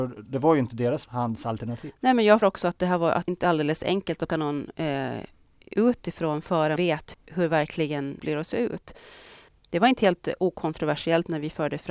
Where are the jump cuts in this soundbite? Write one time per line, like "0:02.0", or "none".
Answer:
0:01.1
0:02.4
0:03.3
0:04.3
0:06.8
0:07.1
0:08.2